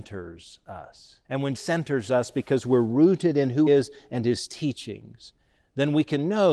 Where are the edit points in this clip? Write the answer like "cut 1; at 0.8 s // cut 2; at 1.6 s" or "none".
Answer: cut 1; at 1.2 s // cut 2; at 1.6 s // cut 3; at 3.7 s